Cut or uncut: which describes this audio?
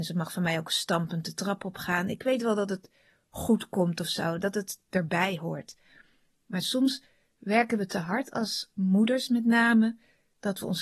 uncut